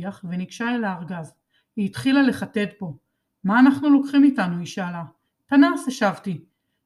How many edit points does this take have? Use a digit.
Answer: 0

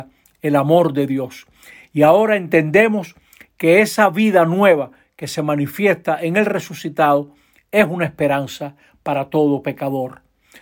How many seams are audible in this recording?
0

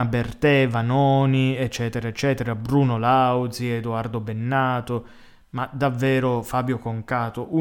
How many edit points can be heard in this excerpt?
0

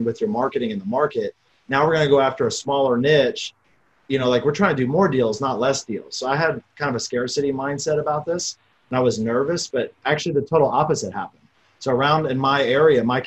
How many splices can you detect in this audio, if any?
0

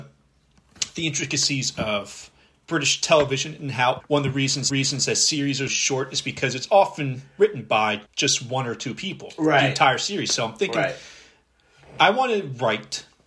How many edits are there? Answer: 4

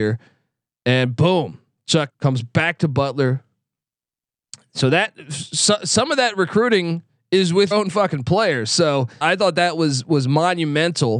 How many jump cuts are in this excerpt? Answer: 3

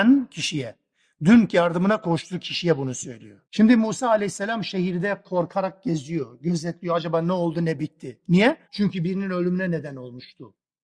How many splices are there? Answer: 2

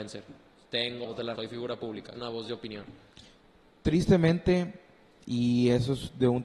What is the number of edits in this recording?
3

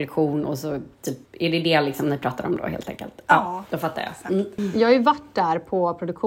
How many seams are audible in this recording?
1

